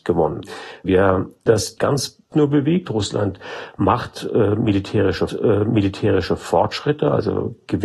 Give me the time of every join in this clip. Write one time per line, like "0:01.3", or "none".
0:01.5
0:01.8
0:02.3
0:05.3